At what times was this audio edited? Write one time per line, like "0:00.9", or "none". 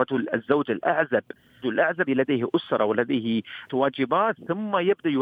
0:01.6
0:02.1
0:03.7